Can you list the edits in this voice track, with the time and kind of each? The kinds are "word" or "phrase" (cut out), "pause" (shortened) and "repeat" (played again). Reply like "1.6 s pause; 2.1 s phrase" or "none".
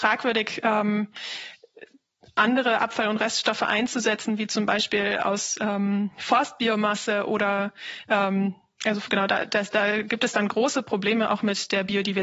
none